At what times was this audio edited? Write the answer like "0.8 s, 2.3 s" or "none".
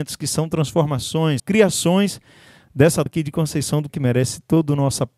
1.4 s, 3.1 s, 3.9 s